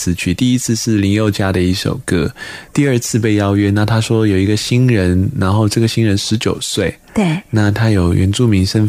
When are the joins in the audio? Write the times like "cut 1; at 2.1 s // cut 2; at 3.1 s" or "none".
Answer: none